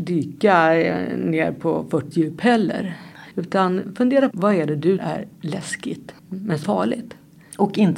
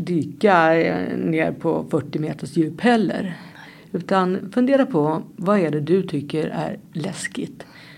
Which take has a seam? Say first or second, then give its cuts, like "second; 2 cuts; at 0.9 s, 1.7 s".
first; 6 cuts; at 2.1 s, 3.3 s, 4.3 s, 5.0 s, 6.2 s, 6.6 s